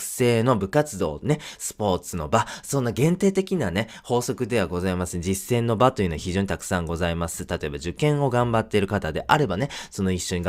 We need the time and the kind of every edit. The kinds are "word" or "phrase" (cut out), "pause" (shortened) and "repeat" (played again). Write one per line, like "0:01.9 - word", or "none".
none